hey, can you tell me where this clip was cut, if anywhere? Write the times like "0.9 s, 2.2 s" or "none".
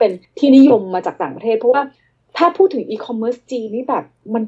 none